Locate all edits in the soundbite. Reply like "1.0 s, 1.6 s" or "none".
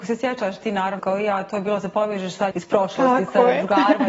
1.0 s, 2.5 s